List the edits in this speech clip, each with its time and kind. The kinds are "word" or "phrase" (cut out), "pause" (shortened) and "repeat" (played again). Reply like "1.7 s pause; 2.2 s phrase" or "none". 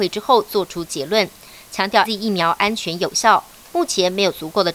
2.0 s word